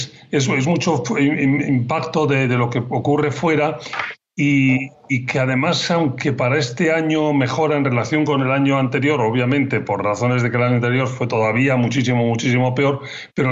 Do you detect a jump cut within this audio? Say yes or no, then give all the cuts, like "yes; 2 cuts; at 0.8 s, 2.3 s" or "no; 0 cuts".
no; 0 cuts